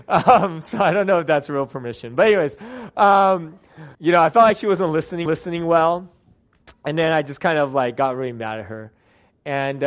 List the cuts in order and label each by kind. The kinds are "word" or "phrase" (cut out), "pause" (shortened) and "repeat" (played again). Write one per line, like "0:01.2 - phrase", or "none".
0:03.9 - pause
0:05.3 - repeat